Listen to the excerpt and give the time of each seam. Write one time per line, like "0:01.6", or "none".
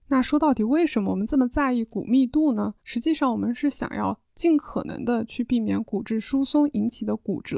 0:02.8